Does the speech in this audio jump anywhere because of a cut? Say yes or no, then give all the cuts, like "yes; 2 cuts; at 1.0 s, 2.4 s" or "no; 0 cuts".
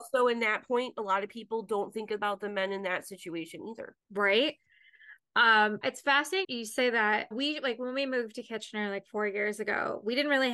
yes; 4 cuts; at 4.0 s, 5.8 s, 6.4 s, 7.3 s